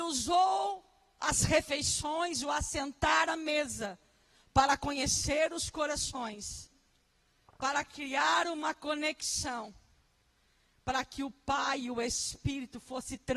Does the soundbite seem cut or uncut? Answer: uncut